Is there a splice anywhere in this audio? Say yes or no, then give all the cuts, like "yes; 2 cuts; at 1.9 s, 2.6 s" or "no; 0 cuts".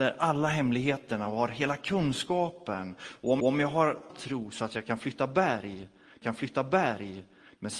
yes; 3 cuts; at 3.4 s, 4.1 s, 6.2 s